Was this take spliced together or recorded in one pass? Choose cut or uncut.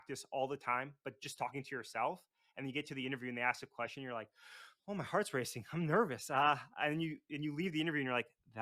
uncut